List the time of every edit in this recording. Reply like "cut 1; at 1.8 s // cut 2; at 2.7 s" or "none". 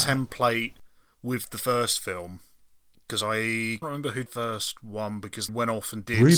cut 1; at 3.8 s // cut 2; at 4.3 s // cut 3; at 5.5 s